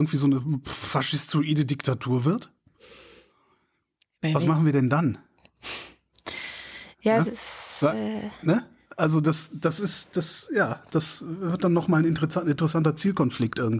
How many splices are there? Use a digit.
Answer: 0